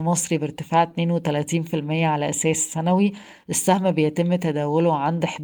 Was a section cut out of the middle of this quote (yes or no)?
no